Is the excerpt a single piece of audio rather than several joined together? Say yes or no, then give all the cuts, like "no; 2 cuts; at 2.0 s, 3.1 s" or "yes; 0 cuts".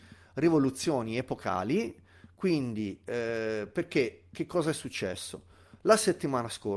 yes; 0 cuts